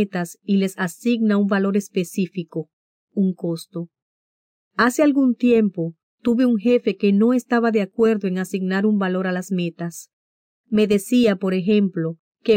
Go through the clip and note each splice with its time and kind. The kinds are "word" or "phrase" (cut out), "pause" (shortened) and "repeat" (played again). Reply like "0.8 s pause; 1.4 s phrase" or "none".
none